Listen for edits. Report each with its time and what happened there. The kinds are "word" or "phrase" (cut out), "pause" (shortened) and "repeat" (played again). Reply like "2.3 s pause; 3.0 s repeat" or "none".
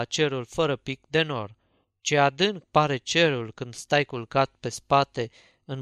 none